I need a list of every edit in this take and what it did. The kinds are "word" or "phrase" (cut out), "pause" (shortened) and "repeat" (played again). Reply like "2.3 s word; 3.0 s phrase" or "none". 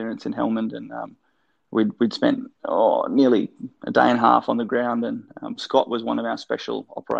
none

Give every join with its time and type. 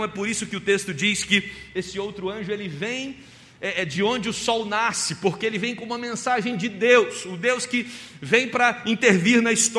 none

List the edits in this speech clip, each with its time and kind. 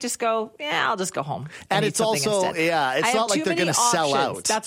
none

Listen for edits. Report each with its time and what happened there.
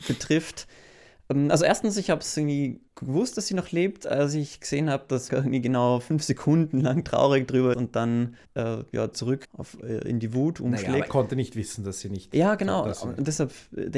2.9 s pause; 5.3 s word; 7.7 s word; 8.4 s pause; 9.1 s word; 9.4 s word; 11.1 s word

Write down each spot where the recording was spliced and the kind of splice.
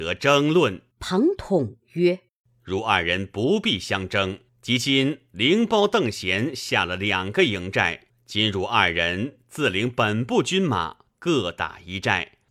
0.9 s pause; 2.3 s pause; 4.5 s pause; 8.1 s pause

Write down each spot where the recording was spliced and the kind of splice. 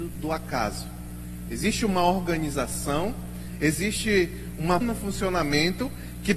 4.8 s word

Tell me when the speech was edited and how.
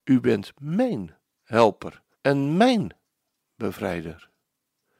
2.1 s pause

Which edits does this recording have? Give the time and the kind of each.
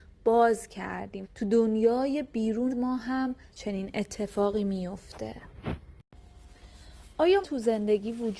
1.2 s word; 2.7 s word; 3.5 s word; 7.4 s word

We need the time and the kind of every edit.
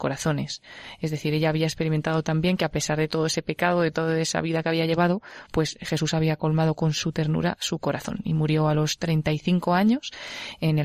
none

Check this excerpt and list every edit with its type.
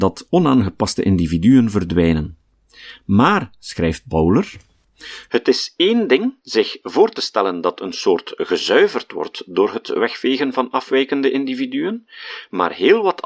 6.4 s pause

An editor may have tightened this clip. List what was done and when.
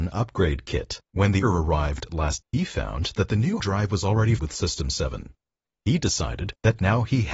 1.1 s pause; 1.4 s word; 2.4 s word; 3.6 s word; 4.4 s word

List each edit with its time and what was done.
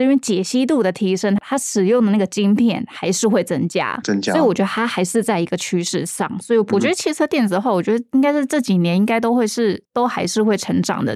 4.0 s word; 6.7 s word

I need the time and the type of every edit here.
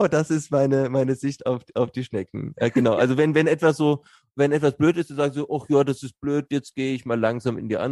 none

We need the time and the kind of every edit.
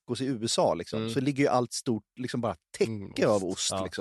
1.7 s phrase

